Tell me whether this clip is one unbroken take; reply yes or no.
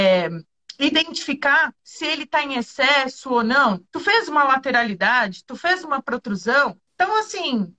no